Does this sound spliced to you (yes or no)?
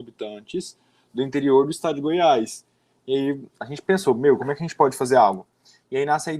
no